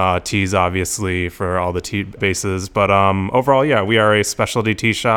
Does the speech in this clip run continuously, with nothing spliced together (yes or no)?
no